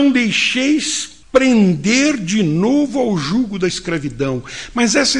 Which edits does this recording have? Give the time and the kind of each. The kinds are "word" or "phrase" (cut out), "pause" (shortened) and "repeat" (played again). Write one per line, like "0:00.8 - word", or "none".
0:01.2 - pause